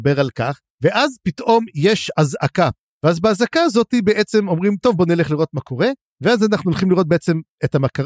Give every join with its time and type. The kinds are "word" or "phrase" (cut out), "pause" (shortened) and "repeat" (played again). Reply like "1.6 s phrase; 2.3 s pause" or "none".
none